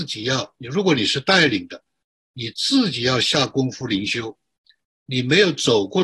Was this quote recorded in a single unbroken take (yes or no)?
yes